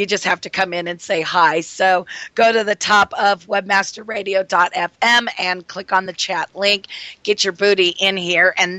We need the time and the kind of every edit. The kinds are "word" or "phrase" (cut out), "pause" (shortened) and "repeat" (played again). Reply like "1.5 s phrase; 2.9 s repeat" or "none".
none